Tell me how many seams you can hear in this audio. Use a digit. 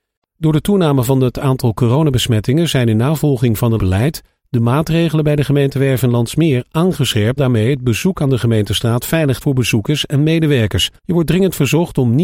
4